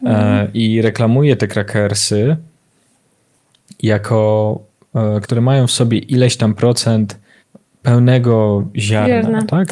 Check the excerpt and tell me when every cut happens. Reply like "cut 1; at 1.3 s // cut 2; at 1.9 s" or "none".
cut 1; at 5.2 s // cut 2; at 7.4 s

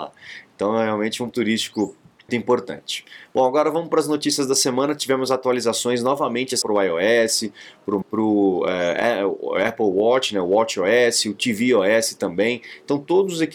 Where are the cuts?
cut 1; at 1.3 s // cut 2; at 2.3 s // cut 3; at 6.6 s // cut 4; at 8.0 s

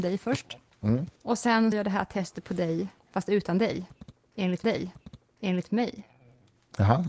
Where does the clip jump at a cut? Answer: cut 1; at 1.2 s // cut 2; at 1.7 s // cut 3; at 4.6 s

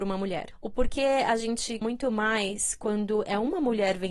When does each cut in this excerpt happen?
cut 1; at 1.8 s

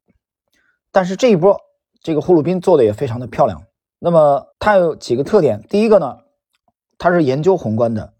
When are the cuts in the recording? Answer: cut 1; at 3.7 s // cut 2; at 4.5 s

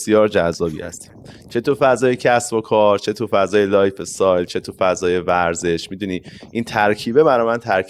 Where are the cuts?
none

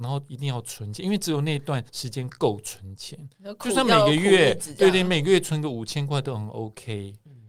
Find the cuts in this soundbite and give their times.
cut 1; at 1.9 s

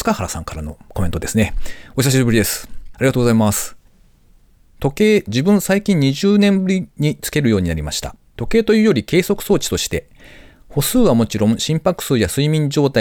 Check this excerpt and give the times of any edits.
none

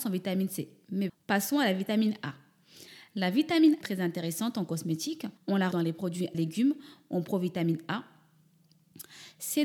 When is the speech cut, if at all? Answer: cut 1; at 1.1 s // cut 2; at 3.8 s // cut 3; at 5.4 s // cut 4; at 5.7 s // cut 5; at 6.3 s

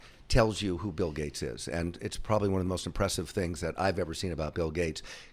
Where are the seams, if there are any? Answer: none

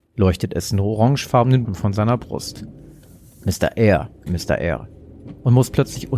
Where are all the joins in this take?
cut 1; at 1.6 s // cut 2; at 4.3 s

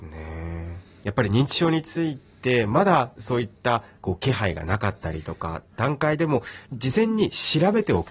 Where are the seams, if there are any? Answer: cut 1; at 6.7 s

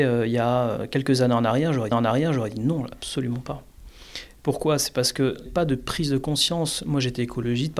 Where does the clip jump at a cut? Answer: cut 1; at 1.9 s // cut 2; at 5.5 s

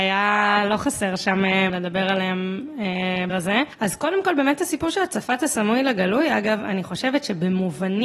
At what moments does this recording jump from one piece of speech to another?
cut 1; at 1.7 s // cut 2; at 3.3 s

